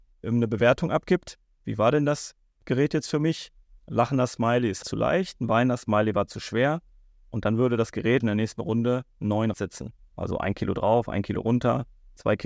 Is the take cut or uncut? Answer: cut